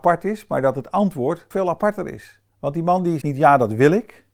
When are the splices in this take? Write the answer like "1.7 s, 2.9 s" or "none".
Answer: 1.5 s, 2.5 s, 3.2 s